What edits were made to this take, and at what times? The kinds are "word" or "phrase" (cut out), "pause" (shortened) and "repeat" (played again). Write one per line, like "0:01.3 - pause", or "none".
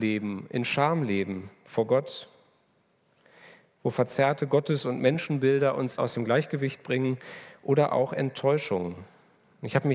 0:06.0 - word